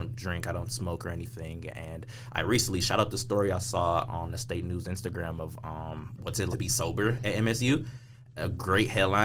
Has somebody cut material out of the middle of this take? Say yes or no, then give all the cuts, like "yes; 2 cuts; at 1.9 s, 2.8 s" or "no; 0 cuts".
yes; 1 cut; at 6.5 s